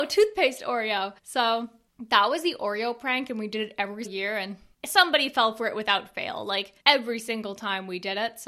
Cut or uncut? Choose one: cut